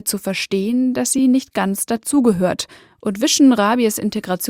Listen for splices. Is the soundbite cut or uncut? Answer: uncut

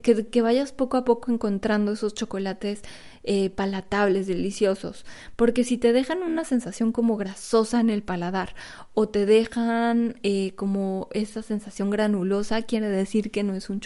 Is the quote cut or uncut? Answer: uncut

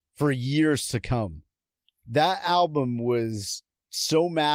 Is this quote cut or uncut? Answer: uncut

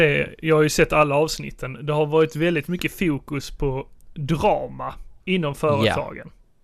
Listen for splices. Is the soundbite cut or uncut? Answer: cut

